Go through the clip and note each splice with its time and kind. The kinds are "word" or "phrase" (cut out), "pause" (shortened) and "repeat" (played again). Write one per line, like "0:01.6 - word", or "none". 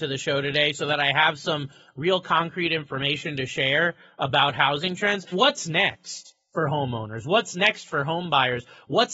0:05.3 - word